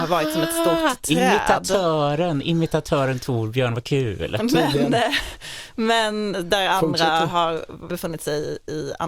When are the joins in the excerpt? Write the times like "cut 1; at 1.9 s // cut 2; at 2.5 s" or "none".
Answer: cut 1; at 7.9 s